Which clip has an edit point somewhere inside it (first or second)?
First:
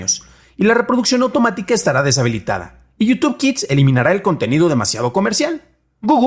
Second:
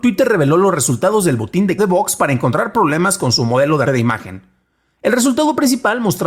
second